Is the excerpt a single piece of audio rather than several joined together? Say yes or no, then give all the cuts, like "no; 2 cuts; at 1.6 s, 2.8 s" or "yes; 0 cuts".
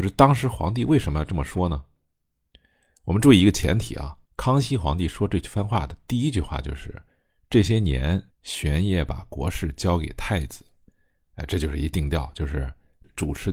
no; 2 cuts; at 4.3 s, 8.3 s